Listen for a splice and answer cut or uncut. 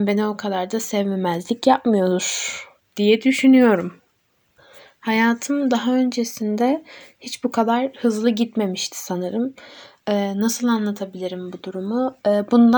uncut